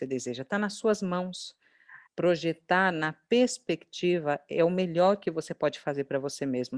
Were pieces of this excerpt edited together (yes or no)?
yes